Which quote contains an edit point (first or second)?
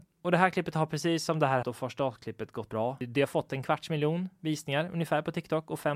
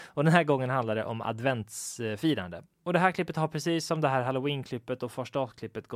first